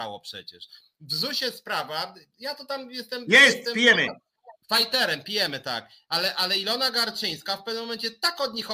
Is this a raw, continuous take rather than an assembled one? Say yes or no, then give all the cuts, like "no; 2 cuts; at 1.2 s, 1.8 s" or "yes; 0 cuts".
no; 1 cut; at 4.6 s